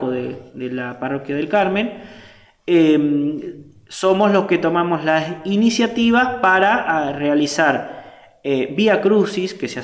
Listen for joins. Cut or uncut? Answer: uncut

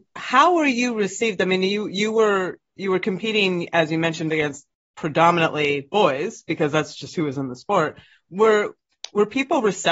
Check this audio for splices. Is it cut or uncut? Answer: uncut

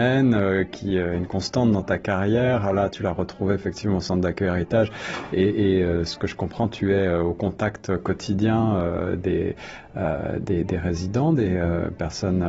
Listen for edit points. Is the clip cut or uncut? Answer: uncut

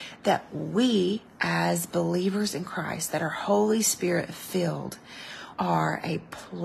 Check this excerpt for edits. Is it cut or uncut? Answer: cut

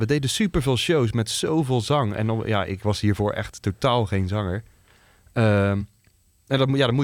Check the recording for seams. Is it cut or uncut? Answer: uncut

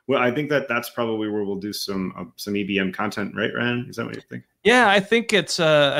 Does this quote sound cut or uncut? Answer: uncut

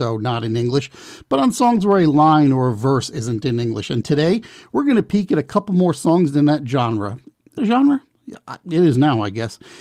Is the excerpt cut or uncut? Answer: cut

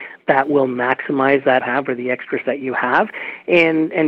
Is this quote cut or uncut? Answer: cut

